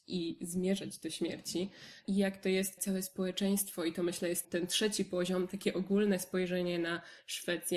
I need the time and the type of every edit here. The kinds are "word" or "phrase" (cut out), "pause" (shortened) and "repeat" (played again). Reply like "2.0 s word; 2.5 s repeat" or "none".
2.8 s word; 4.4 s word